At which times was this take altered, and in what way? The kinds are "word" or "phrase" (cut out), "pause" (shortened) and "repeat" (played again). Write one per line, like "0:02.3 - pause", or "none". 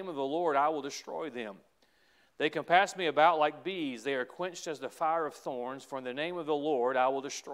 none